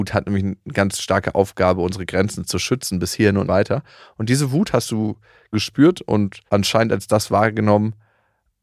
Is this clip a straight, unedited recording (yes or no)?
no